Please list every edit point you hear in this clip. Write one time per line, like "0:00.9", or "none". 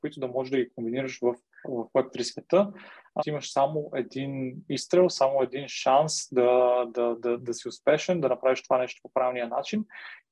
0:01.6
0:03.2
0:07.4